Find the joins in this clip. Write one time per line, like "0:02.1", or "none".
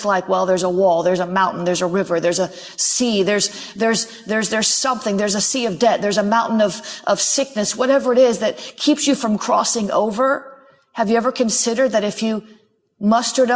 none